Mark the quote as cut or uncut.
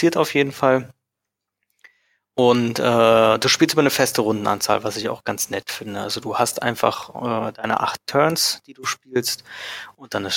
uncut